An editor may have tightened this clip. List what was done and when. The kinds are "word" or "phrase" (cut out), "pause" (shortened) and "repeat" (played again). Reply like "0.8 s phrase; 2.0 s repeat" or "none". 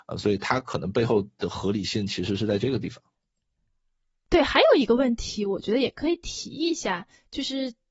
none